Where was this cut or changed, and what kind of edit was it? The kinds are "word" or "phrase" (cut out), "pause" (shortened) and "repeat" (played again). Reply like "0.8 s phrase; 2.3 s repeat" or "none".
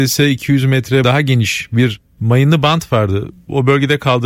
1.0 s word